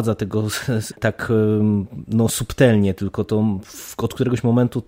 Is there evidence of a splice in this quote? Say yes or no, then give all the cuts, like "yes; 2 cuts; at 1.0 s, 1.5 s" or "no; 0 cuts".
yes; 1 cut; at 0.9 s